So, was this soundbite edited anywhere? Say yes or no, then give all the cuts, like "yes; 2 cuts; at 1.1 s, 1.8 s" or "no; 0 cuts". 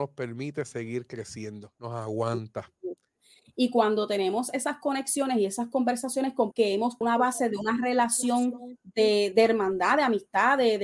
yes; 3 cuts; at 6.5 s, 7.0 s, 9.3 s